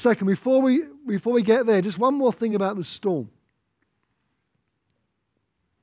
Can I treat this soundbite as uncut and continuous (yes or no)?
yes